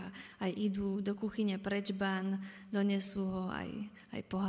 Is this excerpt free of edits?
yes; 0 cuts

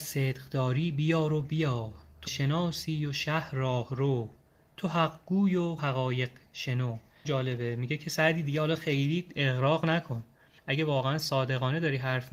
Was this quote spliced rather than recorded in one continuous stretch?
yes; 3 cuts; at 2.3 s, 5.8 s, 7.2 s

